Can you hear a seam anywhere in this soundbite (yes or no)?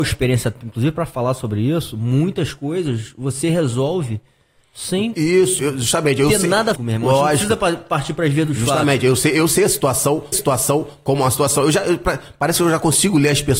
yes